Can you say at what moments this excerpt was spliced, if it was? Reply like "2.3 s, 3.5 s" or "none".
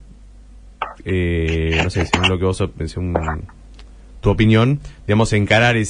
none